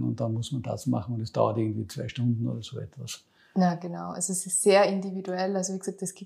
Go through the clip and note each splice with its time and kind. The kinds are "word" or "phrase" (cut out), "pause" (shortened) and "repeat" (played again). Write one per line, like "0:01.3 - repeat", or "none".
none